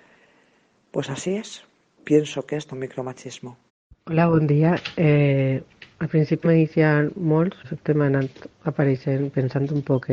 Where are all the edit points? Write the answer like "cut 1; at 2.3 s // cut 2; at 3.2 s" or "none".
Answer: cut 1; at 2.7 s // cut 2; at 3.7 s // cut 3; at 5.9 s // cut 4; at 6.4 s // cut 5; at 7.6 s